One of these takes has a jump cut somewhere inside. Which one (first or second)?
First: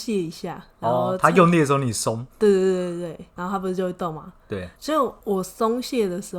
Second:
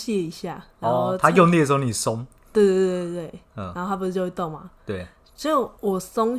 first